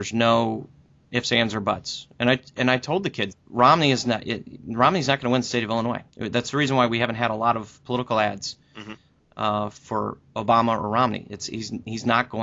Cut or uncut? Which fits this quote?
cut